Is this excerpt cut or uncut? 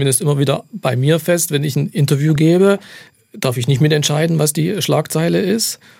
uncut